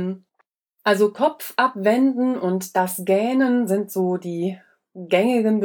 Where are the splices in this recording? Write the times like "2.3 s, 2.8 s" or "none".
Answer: none